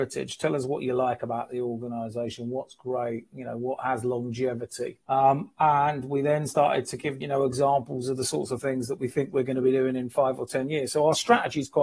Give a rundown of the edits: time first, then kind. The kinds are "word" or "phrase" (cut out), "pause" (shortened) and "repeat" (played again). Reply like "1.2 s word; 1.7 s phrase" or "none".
5.0 s pause; 7.2 s word